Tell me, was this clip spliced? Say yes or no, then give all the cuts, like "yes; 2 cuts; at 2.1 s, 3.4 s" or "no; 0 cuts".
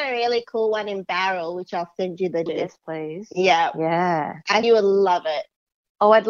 yes; 2 cuts; at 2.5 s, 4.6 s